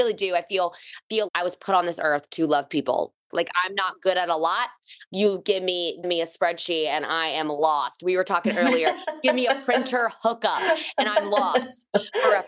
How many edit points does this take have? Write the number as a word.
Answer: two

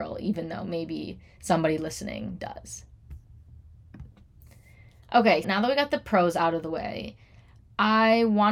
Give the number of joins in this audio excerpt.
one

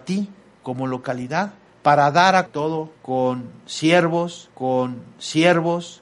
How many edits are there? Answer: three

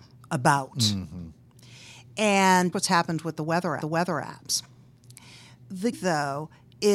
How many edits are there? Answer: three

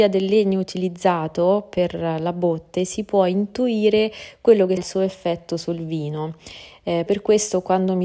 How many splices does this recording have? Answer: two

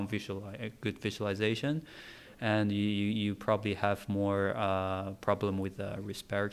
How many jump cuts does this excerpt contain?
zero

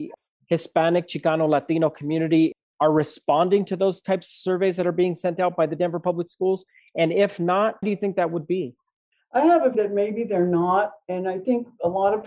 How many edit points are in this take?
two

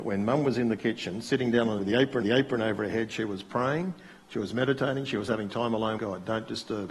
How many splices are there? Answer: three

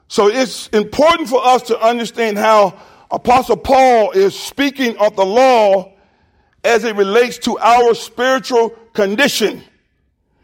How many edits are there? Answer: zero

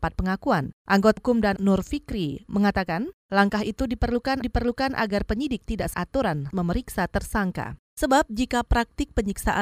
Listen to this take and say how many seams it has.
five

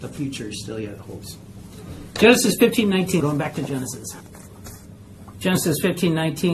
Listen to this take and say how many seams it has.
one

